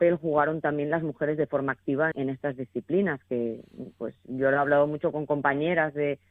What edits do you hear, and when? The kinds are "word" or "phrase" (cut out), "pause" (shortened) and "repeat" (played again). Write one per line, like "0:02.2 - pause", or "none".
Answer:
0:02.1 - word